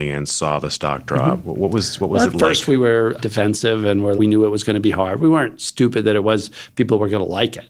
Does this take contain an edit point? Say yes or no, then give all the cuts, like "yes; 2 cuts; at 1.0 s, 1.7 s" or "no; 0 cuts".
yes; 2 cuts; at 3.2 s, 4.2 s